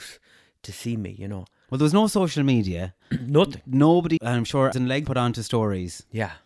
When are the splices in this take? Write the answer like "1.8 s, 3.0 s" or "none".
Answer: 4.2 s, 4.7 s, 5.1 s